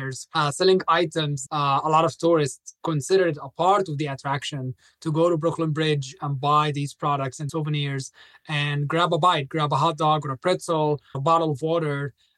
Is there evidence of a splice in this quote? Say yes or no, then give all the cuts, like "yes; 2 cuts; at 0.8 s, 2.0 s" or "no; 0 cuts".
yes; 3 cuts; at 1.5 s, 7.5 s, 11.1 s